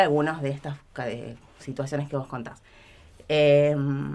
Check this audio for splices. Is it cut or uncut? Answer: uncut